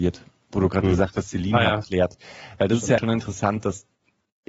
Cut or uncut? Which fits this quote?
cut